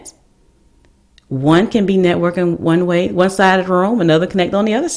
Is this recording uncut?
yes; 0 cuts

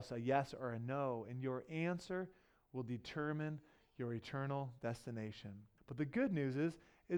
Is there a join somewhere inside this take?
yes; 1 cut; at 5.8 s

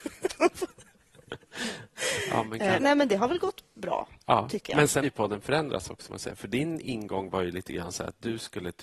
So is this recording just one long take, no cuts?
no; 4 cuts; at 2.8 s, 4.2 s, 5.0 s, 6.1 s

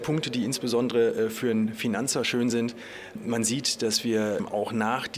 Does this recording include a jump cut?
no; 0 cuts

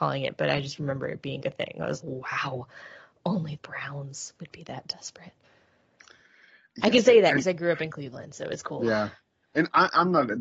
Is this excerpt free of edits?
no; 3 cuts; at 1.4 s, 2.0 s, 3.6 s

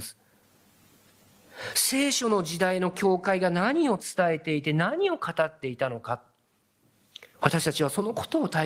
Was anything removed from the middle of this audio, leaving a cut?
yes; 1 cut; at 7.3 s

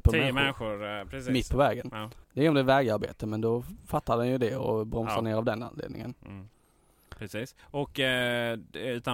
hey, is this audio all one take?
no; 2 cuts; at 2.2 s, 7.6 s

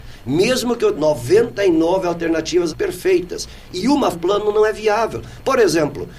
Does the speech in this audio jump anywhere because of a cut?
yes; 3 cuts; at 0.9 s, 2.7 s, 4.1 s

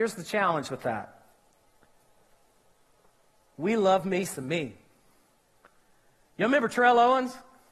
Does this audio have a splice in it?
no; 0 cuts

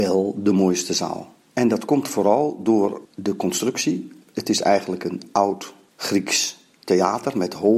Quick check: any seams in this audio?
yes; 3 cuts; at 1.4 s, 3.0 s, 5.9 s

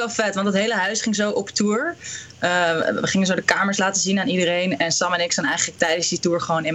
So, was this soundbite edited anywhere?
no; 0 cuts

